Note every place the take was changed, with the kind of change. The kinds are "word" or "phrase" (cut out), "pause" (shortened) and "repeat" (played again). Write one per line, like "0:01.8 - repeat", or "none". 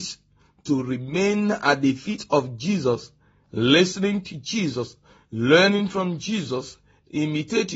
none